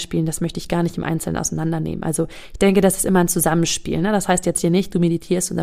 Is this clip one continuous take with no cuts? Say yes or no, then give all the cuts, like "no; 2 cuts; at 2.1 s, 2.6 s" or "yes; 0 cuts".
yes; 0 cuts